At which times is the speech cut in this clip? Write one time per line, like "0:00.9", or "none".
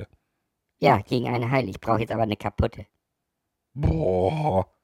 none